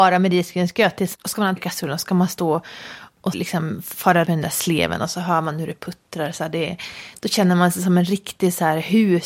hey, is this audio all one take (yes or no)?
no